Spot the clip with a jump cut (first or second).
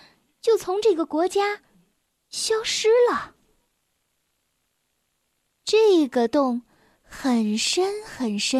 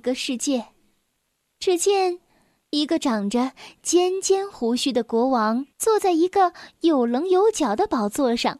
second